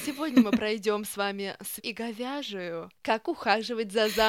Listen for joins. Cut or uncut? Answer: cut